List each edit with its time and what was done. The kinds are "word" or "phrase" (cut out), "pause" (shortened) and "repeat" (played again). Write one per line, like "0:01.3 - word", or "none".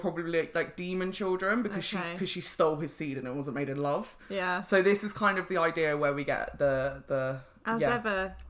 none